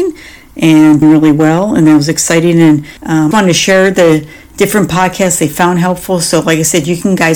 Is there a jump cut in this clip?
yes; 3 cuts; at 1.0 s, 3.0 s, 3.3 s

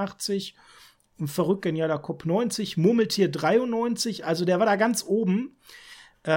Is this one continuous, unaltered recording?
yes; 0 cuts

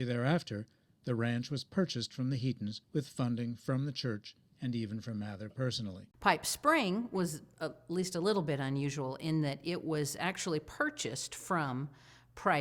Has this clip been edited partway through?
yes; 2 cuts; at 2.8 s, 6.1 s

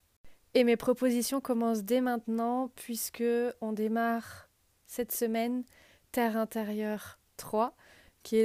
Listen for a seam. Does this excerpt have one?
no; 0 cuts

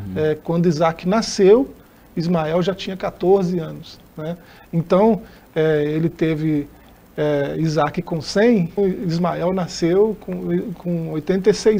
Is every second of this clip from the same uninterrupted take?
no; 1 cut; at 8.8 s

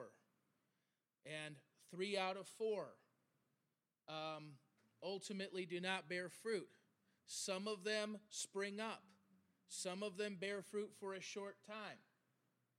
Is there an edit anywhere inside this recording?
no; 0 cuts

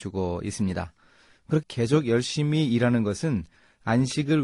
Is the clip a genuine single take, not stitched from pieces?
no; 1 cut; at 1.6 s

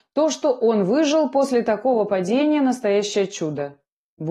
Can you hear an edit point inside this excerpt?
no; 0 cuts

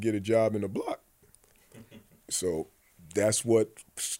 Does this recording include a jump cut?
no; 0 cuts

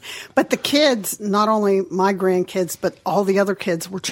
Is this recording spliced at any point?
no; 0 cuts

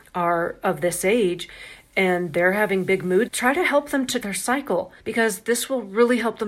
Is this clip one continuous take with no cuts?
no; 3 cuts; at 3.3 s, 4.2 s, 5.0 s

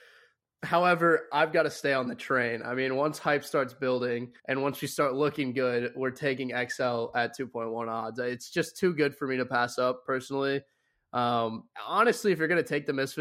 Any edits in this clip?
yes; 2 cuts; at 4.4 s, 11.7 s

